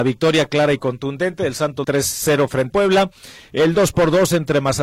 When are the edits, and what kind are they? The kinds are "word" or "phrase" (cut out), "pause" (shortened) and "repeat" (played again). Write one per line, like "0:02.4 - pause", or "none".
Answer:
0:01.8 - word
0:02.7 - word